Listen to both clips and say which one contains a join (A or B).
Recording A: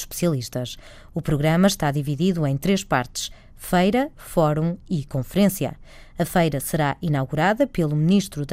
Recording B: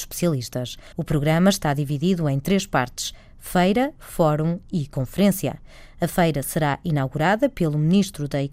B